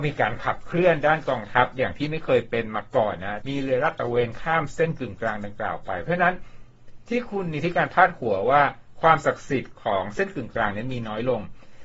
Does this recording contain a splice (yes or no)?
yes